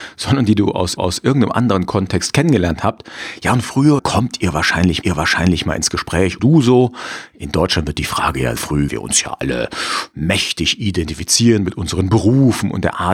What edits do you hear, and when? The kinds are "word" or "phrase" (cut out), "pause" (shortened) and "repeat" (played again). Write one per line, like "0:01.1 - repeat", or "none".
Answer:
0:01.0 - repeat
0:04.0 - phrase
0:05.0 - repeat
0:06.4 - phrase
0:08.6 - word
0:08.9 - phrase